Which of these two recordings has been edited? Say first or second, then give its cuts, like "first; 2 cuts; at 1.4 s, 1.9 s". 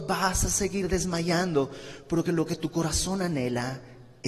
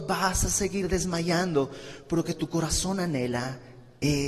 second; 1 cut; at 2.2 s